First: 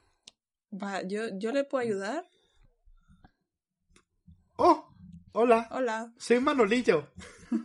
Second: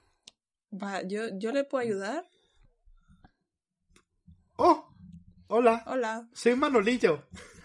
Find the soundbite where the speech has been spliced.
first; 1 cut; at 5.3 s

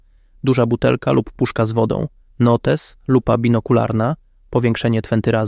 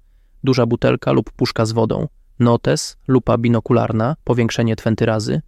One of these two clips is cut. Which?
second; 1 cut; at 4.2 s

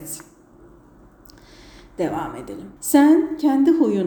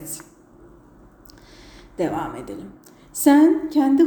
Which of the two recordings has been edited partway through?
first; 1 cut; at 2.8 s

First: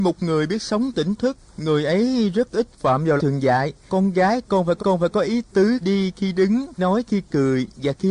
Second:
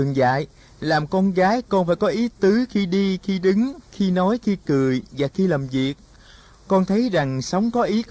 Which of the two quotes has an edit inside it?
first; 6 cuts; at 1.5 s, 3.2 s, 3.9 s, 4.8 s, 5.8 s, 6.8 s

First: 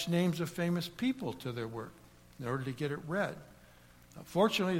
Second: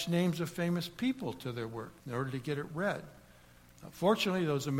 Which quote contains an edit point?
second; 1 cut; at 2.0 s

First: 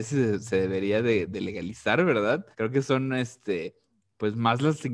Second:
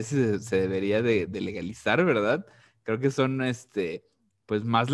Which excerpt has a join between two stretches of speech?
first; 1 cut; at 2.5 s

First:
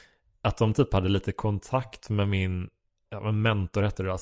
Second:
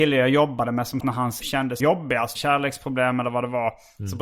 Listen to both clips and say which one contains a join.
second; 4 cuts; at 1.0 s, 1.4 s, 1.8 s, 2.3 s

